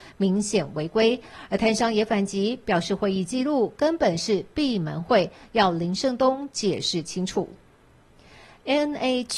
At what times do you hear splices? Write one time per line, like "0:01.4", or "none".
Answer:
none